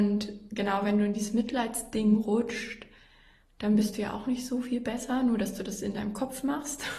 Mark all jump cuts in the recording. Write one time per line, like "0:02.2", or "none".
none